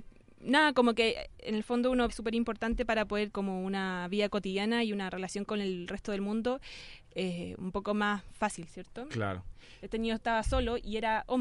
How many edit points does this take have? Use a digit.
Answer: 2